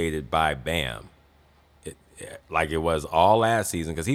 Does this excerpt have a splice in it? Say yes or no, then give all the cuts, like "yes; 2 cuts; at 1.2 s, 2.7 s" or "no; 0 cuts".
no; 0 cuts